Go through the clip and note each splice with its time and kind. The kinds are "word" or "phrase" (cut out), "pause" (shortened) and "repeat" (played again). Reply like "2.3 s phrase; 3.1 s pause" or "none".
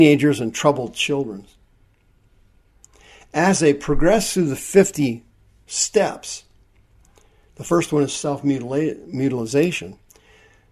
none